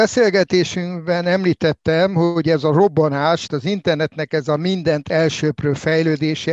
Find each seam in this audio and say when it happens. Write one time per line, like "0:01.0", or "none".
0:03.5